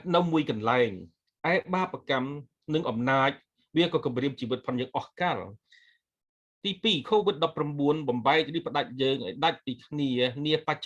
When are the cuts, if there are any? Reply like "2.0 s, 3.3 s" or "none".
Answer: none